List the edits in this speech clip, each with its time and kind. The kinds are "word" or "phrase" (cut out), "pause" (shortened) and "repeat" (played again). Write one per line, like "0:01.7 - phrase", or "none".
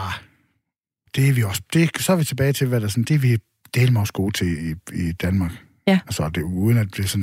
none